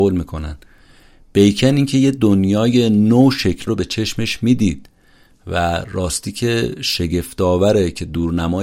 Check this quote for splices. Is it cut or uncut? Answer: cut